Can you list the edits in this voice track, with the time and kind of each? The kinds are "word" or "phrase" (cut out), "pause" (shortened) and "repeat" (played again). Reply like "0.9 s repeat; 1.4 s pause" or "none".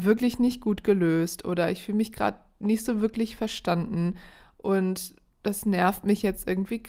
none